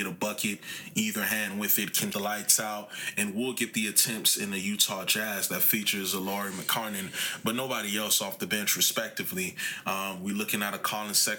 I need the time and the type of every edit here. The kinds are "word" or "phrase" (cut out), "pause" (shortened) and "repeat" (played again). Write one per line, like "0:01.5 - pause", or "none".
0:02.1 - word